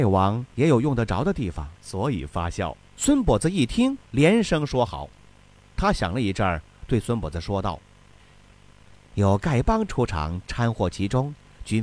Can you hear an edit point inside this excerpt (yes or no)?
yes